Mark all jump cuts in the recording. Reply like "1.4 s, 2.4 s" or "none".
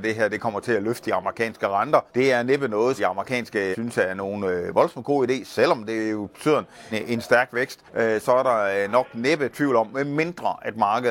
2.1 s, 3.0 s, 3.7 s, 6.9 s, 7.9 s